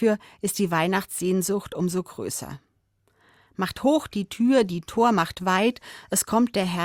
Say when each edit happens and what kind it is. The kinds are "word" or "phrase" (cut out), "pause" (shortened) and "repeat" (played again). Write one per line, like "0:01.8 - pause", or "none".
none